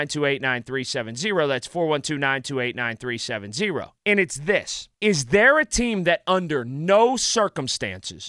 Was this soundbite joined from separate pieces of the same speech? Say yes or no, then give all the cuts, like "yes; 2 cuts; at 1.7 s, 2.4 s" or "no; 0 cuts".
yes; 2 cuts; at 4.0 s, 4.9 s